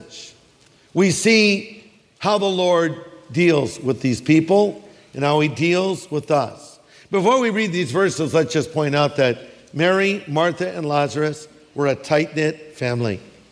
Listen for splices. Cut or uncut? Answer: uncut